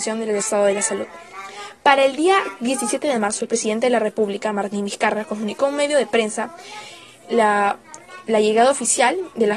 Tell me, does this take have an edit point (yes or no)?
no